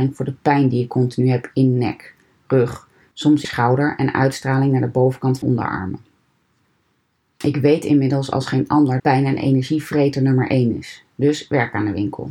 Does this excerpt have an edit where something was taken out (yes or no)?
yes